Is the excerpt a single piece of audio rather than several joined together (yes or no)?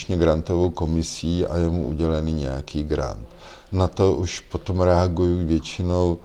yes